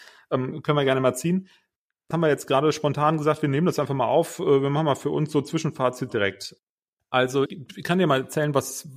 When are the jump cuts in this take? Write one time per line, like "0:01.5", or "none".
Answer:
0:02.1
0:06.1
0:07.5